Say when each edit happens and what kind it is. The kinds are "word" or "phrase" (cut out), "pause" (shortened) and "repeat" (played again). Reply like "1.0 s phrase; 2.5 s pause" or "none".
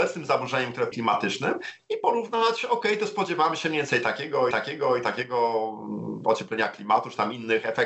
0.9 s phrase; 4.5 s repeat